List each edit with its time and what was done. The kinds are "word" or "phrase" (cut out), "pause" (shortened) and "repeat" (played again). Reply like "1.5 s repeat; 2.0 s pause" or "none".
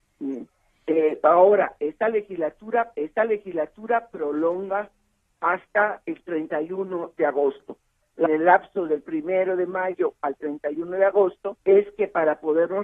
2.9 s repeat; 8.3 s phrase; 11.6 s pause